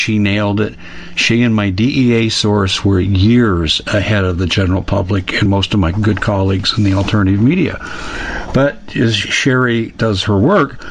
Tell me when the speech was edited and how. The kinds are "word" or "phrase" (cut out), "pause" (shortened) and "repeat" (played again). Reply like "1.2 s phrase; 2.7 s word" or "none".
5.5 s word